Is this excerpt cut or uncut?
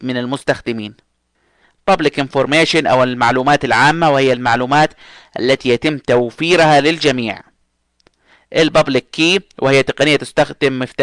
uncut